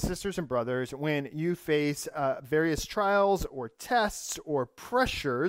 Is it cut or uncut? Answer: uncut